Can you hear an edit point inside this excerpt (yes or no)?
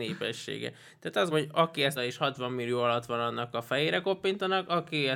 yes